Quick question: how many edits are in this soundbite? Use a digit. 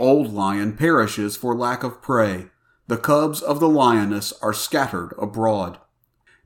0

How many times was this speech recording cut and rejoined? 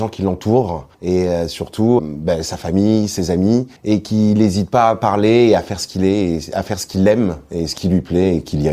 3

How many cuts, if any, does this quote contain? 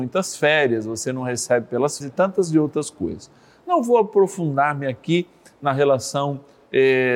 1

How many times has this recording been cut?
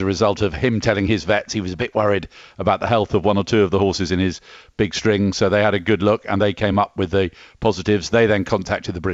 0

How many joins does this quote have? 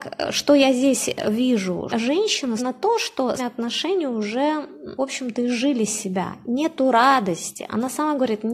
4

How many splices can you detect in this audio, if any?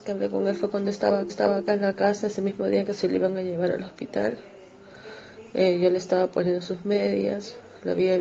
1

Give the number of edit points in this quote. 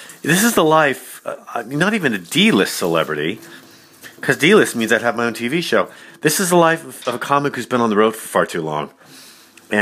1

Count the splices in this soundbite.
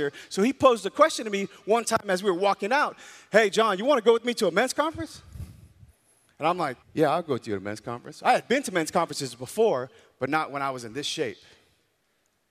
1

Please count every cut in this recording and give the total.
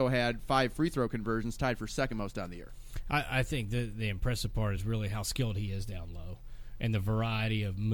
0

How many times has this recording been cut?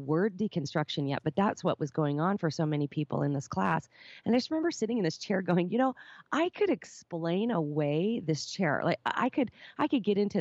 0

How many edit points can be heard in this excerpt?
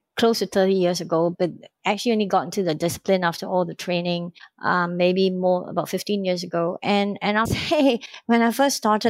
2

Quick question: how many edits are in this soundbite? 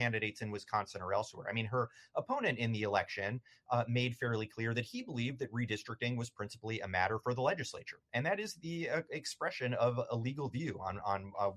0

